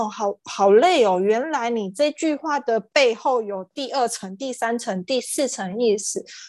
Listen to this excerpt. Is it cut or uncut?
uncut